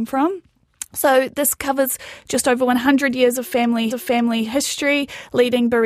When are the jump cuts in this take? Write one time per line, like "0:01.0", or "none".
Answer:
0:03.9